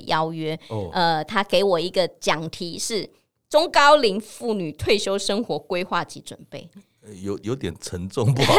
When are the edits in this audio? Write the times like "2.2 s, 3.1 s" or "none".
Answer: none